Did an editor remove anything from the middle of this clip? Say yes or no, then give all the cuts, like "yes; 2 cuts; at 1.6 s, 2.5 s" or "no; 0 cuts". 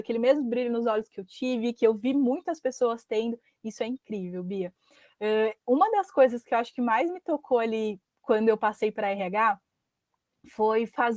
no; 0 cuts